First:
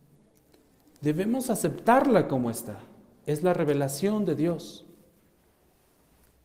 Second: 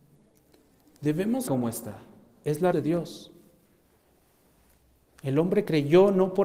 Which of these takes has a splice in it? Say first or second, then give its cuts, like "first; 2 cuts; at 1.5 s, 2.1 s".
second; 2 cuts; at 1.5 s, 2.7 s